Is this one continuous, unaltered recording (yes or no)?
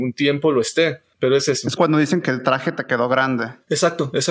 no